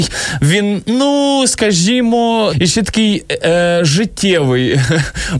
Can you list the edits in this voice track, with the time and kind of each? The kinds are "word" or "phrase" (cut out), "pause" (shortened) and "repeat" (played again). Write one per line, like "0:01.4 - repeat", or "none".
0:02.5 - word